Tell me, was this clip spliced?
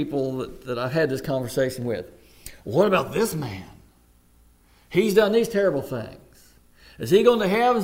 no; 0 cuts

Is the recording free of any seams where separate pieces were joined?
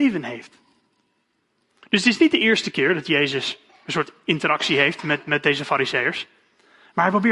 yes; 0 cuts

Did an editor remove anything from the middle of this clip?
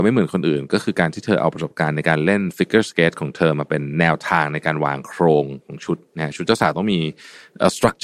yes; 1 cut; at 6.1 s

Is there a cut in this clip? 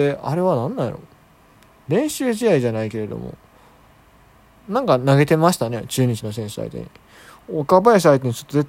no; 0 cuts

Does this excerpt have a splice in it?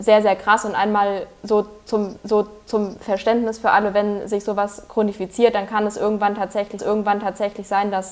yes; 2 cuts; at 2.2 s, 6.8 s

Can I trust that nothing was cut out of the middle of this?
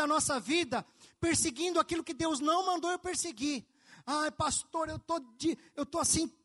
yes; 0 cuts

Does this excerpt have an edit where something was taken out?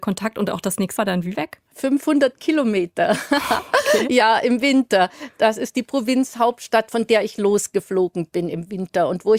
yes; 3 cuts; at 1.0 s, 1.3 s, 1.7 s

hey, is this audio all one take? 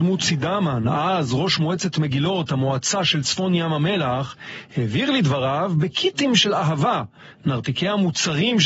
yes; 0 cuts

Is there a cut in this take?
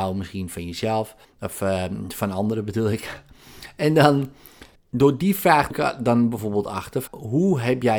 yes; 4 cuts; at 1.2 s, 4.8 s, 5.7 s, 7.1 s

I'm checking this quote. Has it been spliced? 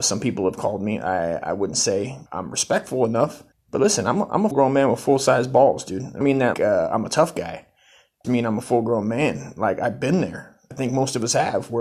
yes; 7 cuts; at 2.3 s, 3.5 s, 4.5 s, 6.2 s, 6.5 s, 8.2 s, 10.7 s

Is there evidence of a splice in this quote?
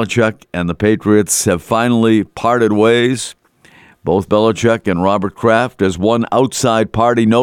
no; 0 cuts

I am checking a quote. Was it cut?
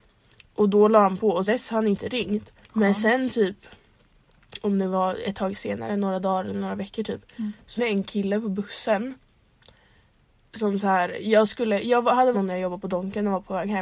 yes; 4 cuts; at 1.5 s, 2.6 s, 7.8 s, 12.3 s

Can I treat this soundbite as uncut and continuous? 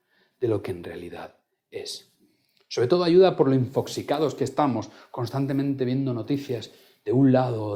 yes; 0 cuts

